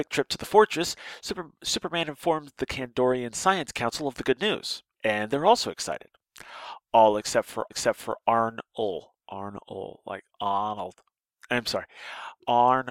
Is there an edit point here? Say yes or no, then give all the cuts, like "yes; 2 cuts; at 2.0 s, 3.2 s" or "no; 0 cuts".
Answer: yes; 2 cuts; at 7.7 s, 9.2 s